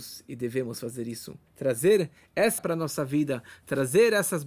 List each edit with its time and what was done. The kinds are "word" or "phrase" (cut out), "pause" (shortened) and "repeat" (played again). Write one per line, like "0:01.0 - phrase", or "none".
0:02.6 - word